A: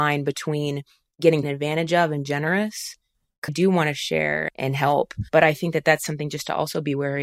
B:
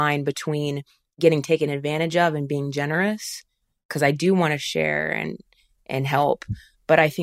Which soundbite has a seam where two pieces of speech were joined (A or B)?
A